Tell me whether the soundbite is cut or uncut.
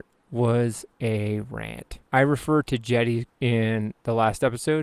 cut